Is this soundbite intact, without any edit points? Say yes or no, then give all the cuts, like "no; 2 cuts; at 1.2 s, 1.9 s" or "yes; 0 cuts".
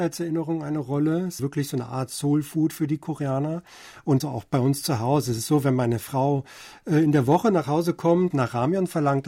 no; 3 cuts; at 1.4 s, 4.2 s, 8.3 s